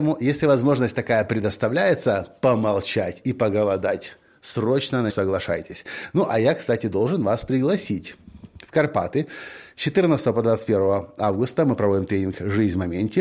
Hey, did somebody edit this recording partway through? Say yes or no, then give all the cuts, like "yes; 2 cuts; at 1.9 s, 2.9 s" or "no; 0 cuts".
yes; 1 cut; at 5.1 s